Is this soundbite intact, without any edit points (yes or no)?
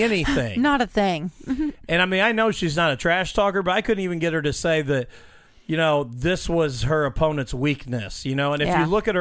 yes